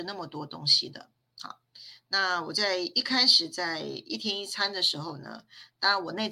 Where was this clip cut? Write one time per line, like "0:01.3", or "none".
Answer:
0:01.2